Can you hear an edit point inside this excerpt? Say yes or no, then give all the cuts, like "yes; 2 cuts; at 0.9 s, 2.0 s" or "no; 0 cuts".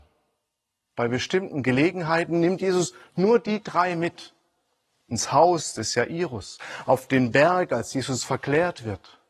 no; 0 cuts